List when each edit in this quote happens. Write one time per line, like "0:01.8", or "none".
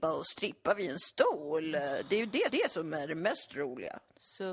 0:02.5